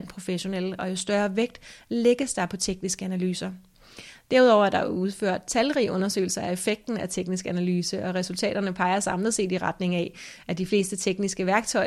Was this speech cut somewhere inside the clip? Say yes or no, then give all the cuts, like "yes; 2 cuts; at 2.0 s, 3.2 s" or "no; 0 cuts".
no; 0 cuts